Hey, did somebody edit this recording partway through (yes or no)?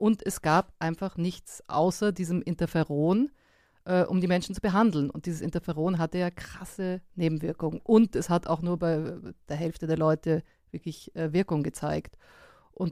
no